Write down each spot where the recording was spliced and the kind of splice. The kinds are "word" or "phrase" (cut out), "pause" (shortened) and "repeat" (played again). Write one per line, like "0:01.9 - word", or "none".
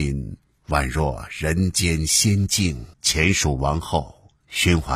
0:02.9 - pause